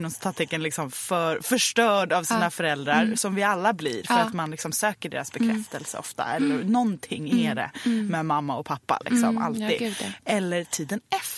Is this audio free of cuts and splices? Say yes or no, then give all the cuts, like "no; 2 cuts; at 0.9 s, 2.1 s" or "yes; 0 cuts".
yes; 0 cuts